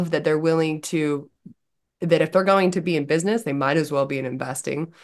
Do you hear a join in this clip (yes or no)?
no